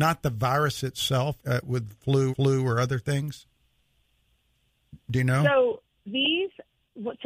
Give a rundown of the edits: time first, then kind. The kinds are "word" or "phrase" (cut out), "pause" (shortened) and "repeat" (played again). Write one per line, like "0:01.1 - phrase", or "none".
0:01.4 - word
0:02.3 - repeat
0:06.1 - word

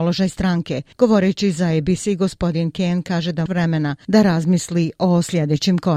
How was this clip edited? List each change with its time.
0:03.5 - phrase

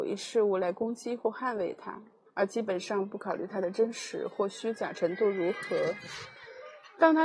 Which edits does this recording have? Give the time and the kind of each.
0:02.3 - pause

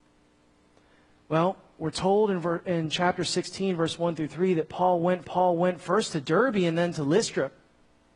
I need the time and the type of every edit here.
0:05.2 - repeat

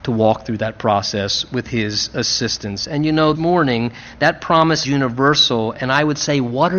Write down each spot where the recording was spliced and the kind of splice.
0:03.3 - word
0:04.8 - word

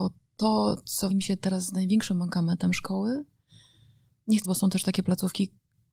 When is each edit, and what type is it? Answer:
0:01.1 - word
0:04.4 - word

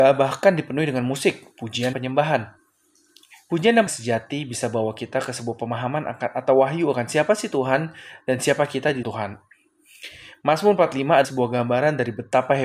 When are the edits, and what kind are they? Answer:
0:01.9 - word
0:03.9 - word
0:09.0 - word
0:11.2 - word

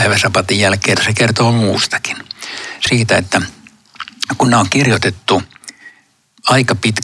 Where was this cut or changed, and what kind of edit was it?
0:01.0 - word
0:02.9 - word

